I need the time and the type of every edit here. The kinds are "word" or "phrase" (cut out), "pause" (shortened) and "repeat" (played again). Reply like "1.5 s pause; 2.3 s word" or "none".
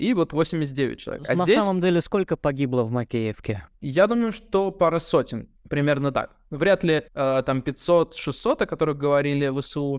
3.7 s pause; 5.6 s pause; 7.1 s pause